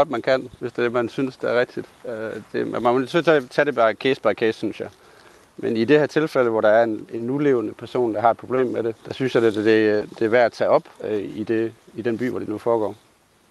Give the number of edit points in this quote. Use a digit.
2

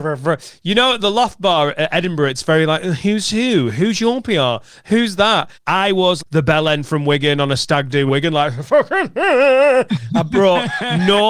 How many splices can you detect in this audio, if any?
3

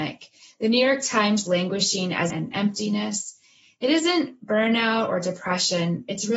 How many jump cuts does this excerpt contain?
2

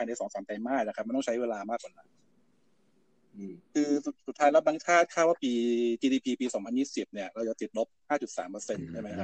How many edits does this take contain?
0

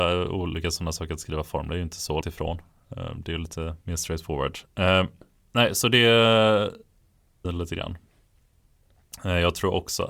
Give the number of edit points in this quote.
3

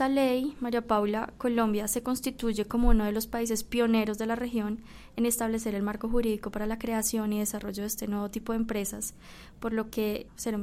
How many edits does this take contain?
0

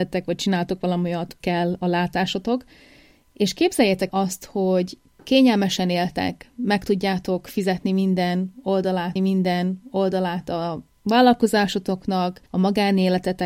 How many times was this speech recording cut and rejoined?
4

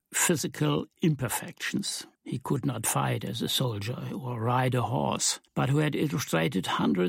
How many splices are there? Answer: 2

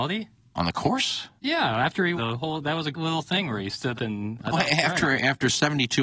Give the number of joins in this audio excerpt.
5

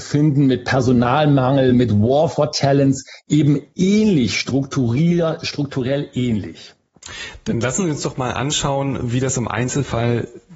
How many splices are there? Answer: 0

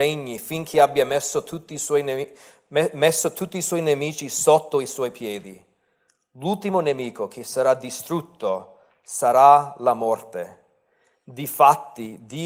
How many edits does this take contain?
0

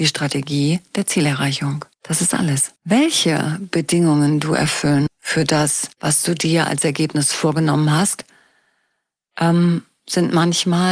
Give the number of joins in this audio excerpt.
4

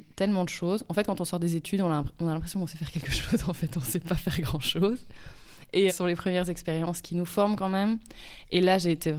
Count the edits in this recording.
2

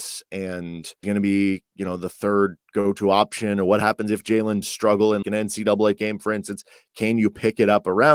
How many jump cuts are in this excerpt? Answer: 4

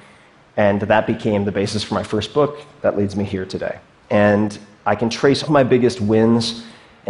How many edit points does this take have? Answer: 2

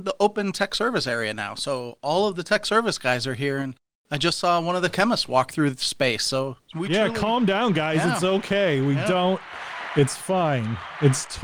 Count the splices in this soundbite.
0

